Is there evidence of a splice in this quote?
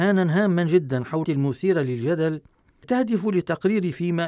yes; 2 cuts; at 1.2 s, 2.8 s

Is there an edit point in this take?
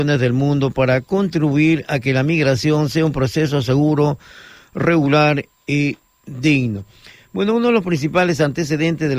no; 0 cuts

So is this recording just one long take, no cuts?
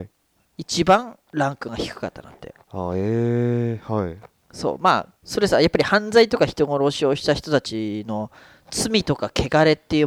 no; 1 cut; at 5.2 s

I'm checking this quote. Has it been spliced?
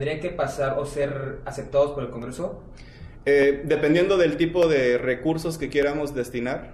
no; 0 cuts

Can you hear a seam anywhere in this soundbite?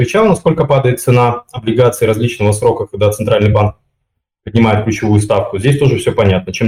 no; 0 cuts

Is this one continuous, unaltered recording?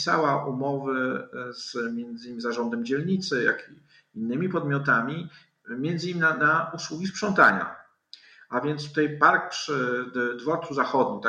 yes; 0 cuts

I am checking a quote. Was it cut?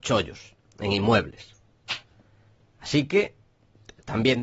no; 0 cuts

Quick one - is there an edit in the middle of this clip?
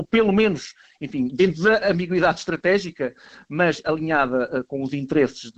no; 0 cuts

